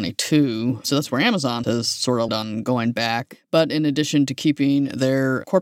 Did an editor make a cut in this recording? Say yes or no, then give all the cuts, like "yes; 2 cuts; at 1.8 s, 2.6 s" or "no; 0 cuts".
yes; 2 cuts; at 1.6 s, 2.3 s